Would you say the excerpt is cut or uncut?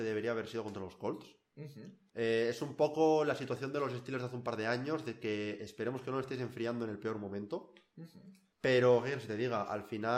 cut